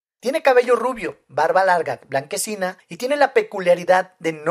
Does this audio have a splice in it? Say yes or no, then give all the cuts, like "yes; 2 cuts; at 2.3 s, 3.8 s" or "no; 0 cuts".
no; 0 cuts